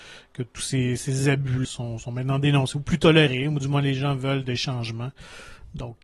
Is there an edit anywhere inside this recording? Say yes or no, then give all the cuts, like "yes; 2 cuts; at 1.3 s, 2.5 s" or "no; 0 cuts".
yes; 1 cut; at 1.6 s